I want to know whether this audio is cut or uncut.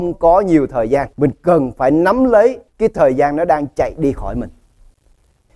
cut